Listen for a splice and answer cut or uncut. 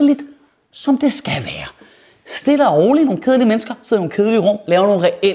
uncut